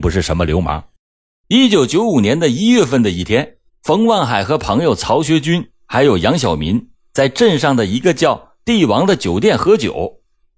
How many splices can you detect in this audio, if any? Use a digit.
2